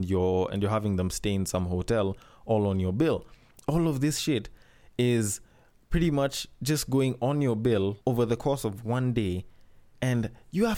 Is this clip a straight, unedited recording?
yes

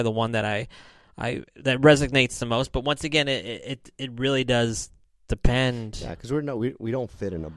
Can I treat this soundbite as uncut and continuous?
yes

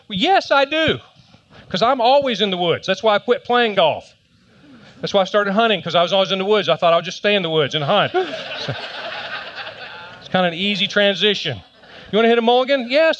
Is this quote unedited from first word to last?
yes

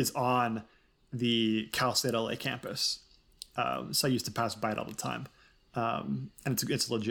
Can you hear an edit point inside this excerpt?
no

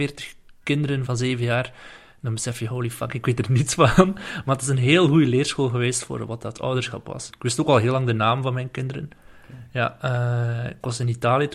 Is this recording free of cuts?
no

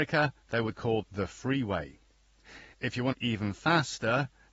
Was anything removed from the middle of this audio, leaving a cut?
yes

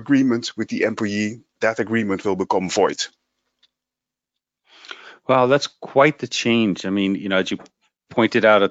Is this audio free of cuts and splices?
no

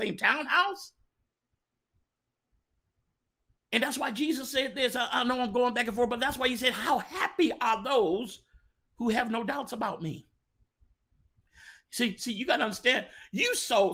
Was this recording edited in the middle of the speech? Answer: no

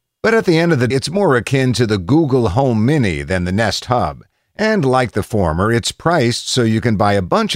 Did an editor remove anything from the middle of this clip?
yes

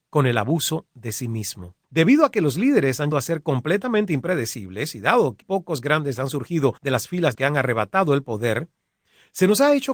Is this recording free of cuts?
no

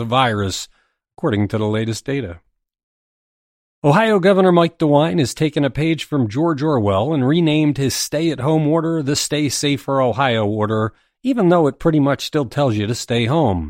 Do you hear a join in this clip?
no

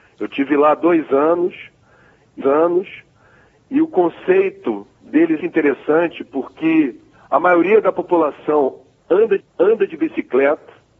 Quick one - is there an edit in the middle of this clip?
yes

